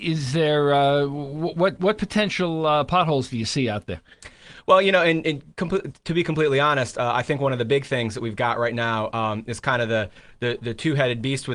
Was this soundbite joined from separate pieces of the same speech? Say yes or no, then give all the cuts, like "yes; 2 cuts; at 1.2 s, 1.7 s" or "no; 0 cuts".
no; 0 cuts